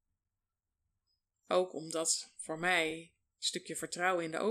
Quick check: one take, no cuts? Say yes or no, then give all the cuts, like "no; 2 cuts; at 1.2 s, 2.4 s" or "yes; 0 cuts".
yes; 0 cuts